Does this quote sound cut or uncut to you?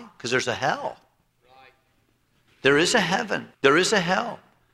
cut